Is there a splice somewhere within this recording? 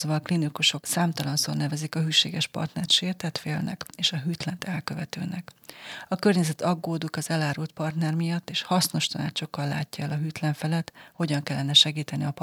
no; 0 cuts

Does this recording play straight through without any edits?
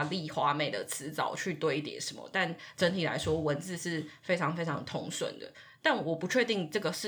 yes; 0 cuts

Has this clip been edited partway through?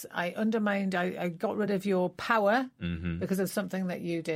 no; 0 cuts

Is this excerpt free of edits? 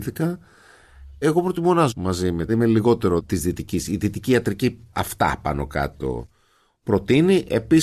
no; 2 cuts; at 1.9 s, 2.5 s

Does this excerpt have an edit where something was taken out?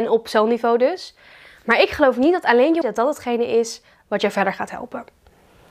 yes; 1 cut; at 2.8 s

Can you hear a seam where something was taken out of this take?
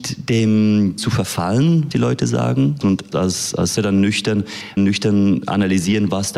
yes; 5 cuts; at 1.0 s, 1.9 s, 3.1 s, 3.8 s, 4.8 s

